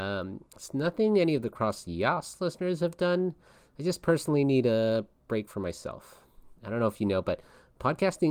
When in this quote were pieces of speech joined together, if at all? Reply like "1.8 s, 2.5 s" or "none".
none